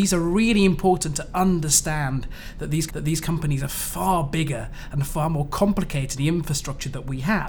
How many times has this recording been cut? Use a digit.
2